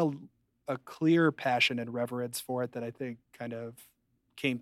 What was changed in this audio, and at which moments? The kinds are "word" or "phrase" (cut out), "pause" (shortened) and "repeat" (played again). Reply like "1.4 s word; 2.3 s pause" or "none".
3.2 s pause